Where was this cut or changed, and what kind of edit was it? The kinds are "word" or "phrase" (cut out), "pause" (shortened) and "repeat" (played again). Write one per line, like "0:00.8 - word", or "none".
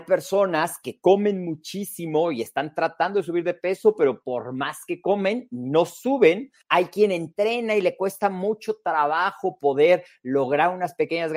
0:06.6 - pause